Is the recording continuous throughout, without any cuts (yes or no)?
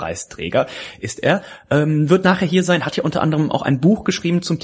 yes